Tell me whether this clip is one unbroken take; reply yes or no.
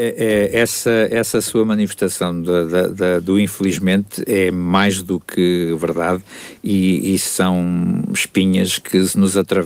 yes